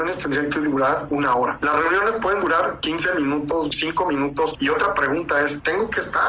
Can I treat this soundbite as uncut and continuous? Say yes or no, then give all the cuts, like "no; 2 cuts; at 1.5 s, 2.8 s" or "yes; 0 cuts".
yes; 0 cuts